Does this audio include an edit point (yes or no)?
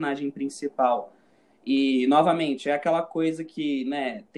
no